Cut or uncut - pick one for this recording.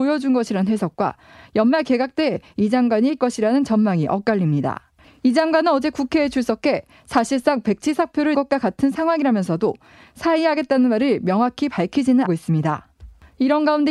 cut